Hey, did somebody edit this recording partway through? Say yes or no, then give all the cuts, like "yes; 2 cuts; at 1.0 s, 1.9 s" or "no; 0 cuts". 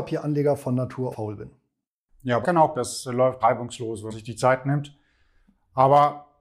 yes; 5 cuts; at 1.1 s, 2.4 s, 2.7 s, 3.4 s, 4.1 s